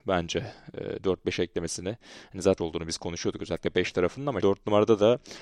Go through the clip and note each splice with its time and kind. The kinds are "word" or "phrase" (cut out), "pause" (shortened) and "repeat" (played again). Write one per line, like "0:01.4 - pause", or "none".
0:02.6 - word
0:04.4 - word